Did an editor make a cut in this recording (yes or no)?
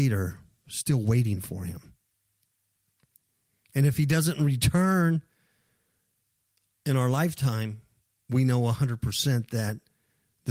no